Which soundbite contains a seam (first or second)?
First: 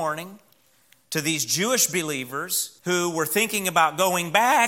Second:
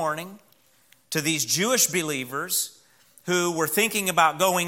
first